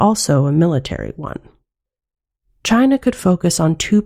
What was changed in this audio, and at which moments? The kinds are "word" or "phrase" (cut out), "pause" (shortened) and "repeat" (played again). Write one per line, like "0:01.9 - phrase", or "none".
none